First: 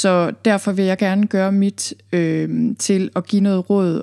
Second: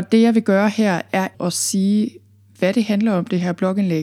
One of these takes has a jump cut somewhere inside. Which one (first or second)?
second